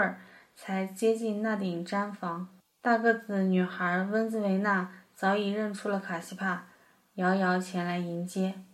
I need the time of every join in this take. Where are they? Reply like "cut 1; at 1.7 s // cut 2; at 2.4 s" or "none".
cut 1; at 2.6 s